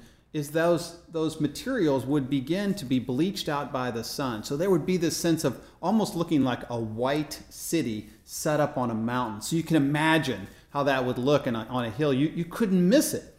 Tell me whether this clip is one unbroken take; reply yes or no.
yes